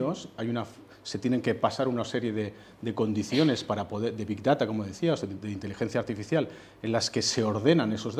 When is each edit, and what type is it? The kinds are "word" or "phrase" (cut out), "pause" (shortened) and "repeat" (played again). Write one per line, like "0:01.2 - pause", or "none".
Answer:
none